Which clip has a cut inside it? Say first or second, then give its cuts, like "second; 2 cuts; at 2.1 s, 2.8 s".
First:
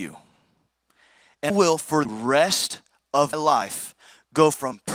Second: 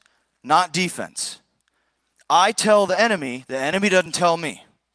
first; 3 cuts; at 1.5 s, 2.0 s, 3.3 s